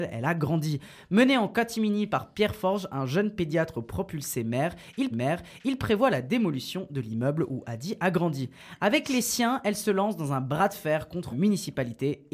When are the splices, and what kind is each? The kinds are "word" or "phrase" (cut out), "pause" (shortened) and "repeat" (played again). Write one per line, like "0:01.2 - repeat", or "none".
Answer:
0:05.1 - repeat
0:11.3 - word

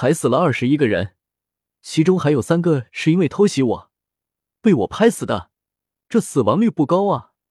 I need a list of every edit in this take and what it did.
none

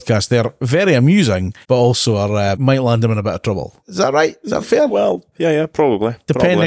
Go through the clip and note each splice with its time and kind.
0:01.6 - pause
0:02.5 - word
0:03.8 - pause
0:05.3 - word

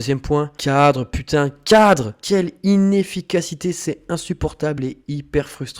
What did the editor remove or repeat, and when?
none

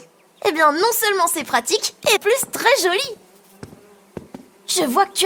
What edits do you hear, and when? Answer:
0:02.2 - word

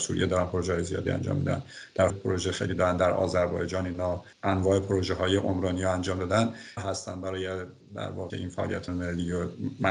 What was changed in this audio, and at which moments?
0:02.1 - phrase
0:04.3 - pause
0:06.8 - phrase
0:08.3 - word
0:08.9 - phrase

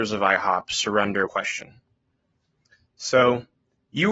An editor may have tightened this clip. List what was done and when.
0:01.3 - word

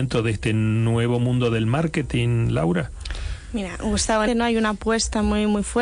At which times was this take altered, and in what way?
0:04.3 - phrase

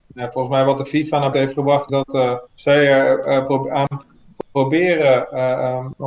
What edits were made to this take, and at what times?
0:01.3 - word
0:01.9 - word
0:02.5 - pause

